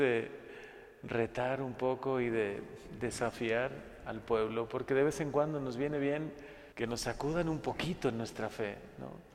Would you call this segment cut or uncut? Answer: cut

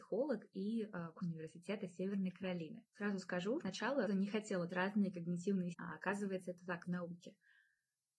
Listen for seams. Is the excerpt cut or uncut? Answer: cut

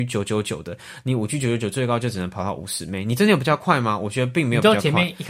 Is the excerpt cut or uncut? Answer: uncut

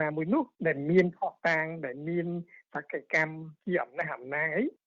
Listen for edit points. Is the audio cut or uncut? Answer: uncut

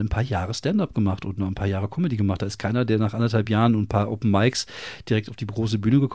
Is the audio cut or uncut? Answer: uncut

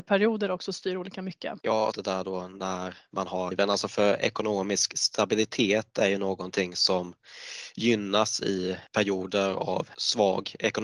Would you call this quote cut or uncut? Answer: cut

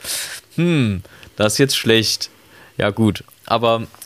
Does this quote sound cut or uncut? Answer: uncut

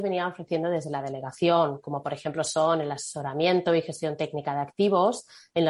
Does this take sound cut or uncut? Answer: uncut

